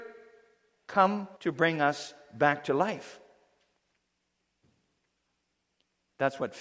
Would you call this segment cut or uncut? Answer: cut